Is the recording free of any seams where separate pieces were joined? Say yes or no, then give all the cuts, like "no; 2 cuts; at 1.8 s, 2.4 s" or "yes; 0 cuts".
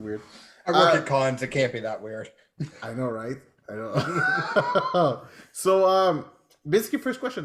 yes; 0 cuts